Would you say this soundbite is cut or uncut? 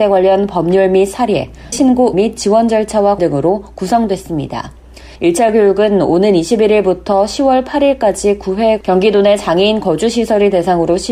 cut